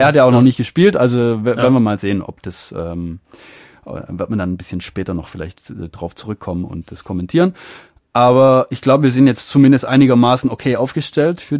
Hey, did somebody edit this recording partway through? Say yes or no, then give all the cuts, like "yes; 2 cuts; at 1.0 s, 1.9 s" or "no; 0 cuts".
no; 0 cuts